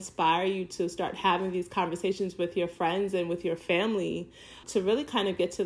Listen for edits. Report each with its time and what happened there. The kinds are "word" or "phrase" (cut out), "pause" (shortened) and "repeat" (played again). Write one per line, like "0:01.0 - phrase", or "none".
0:04.6 - word